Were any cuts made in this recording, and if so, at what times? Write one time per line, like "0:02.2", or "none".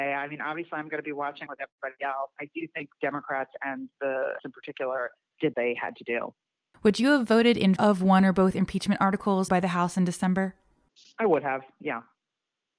0:01.5
0:02.4
0:03.0
0:04.4
0:05.5
0:07.8
0:09.5